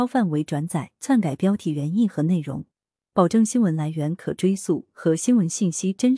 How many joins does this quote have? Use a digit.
1